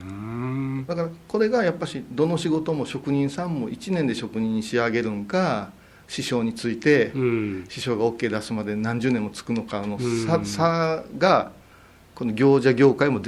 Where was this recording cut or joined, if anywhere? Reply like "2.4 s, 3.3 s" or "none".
none